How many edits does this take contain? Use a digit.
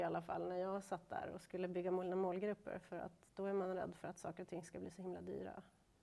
0